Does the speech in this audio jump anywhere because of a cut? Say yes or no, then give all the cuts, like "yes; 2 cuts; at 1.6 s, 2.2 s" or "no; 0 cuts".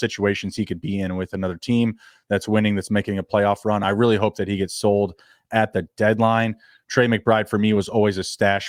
no; 0 cuts